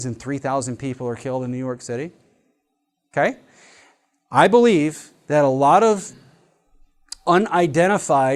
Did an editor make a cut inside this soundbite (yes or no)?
no